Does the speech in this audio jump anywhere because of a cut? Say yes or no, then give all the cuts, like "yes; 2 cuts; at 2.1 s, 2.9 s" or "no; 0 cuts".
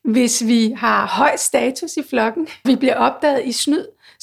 yes; 1 cut; at 2.6 s